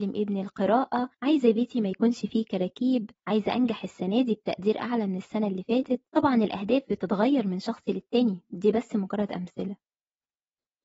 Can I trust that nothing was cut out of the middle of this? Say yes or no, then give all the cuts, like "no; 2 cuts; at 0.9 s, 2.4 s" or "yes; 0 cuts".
no; 3 cuts; at 1.1 s, 3.2 s, 6.1 s